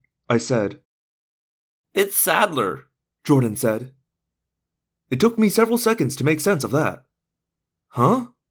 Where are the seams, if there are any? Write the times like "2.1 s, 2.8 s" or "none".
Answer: none